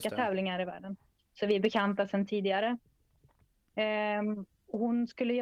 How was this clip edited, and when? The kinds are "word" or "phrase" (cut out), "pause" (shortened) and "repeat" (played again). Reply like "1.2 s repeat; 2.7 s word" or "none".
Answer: none